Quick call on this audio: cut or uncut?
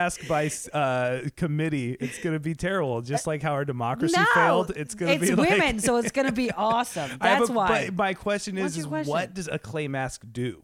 uncut